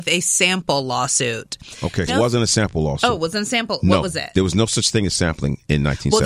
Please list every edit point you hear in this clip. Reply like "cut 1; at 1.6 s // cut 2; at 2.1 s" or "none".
cut 1; at 2.1 s